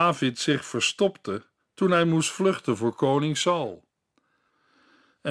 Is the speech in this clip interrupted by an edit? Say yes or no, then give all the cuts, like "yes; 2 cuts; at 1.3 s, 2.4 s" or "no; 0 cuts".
no; 0 cuts